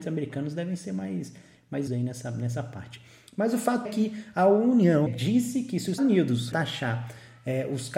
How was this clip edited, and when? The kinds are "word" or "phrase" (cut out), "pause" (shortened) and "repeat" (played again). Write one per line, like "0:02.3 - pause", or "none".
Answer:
0:01.9 - word
0:03.8 - word
0:05.1 - word
0:06.0 - word
0:06.5 - word